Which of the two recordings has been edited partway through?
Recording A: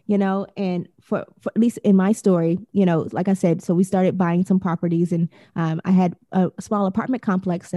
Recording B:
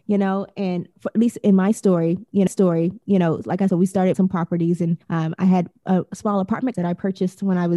B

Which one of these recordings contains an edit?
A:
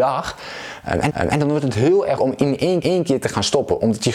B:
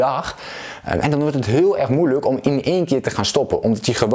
A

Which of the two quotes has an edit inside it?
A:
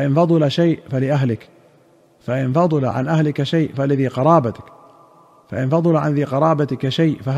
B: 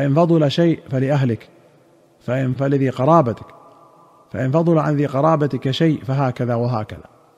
B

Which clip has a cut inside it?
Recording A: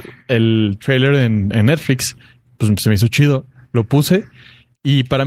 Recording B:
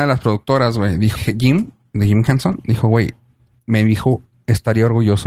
B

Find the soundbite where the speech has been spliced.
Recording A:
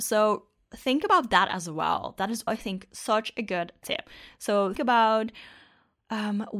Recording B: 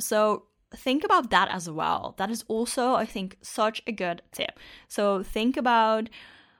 A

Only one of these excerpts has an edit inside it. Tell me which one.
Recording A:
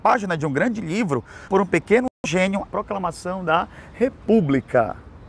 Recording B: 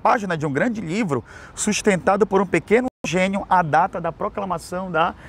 A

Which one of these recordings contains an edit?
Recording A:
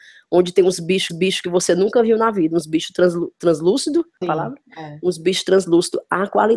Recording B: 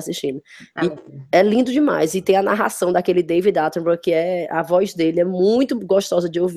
A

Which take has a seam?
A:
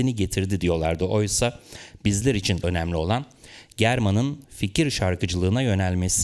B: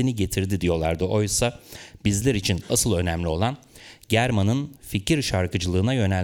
A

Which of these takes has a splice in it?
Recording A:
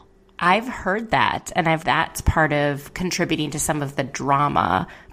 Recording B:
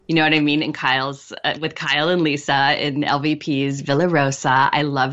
A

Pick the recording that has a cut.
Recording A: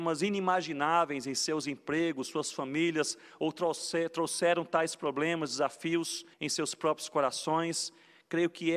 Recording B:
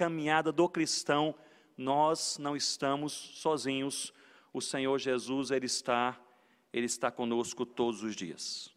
A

